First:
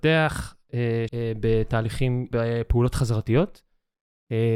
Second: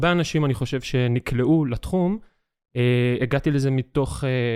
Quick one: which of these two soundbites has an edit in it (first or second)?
first